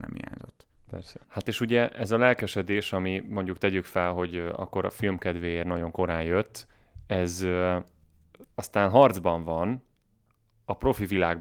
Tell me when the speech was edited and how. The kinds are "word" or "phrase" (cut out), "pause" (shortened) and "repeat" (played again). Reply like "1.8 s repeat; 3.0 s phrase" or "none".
1.2 s pause; 8.5 s pause